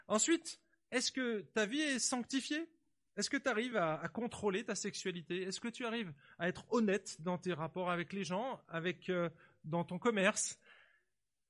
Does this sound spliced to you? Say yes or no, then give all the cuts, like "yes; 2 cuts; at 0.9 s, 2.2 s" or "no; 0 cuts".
no; 0 cuts